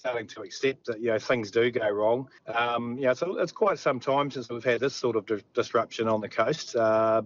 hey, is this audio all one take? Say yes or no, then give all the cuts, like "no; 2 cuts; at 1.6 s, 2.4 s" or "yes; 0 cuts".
no; 1 cut; at 2.4 s